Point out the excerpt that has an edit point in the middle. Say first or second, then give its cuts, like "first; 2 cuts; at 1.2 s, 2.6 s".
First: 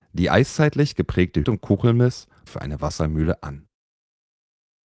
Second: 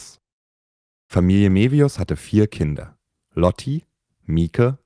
first; 2 cuts; at 1.4 s, 2.5 s